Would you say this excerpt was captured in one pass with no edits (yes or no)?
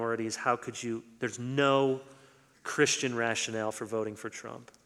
yes